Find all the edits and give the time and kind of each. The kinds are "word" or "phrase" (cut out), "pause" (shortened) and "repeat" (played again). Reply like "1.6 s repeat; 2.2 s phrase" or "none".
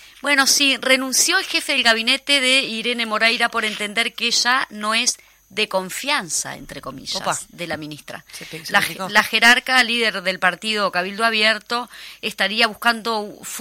none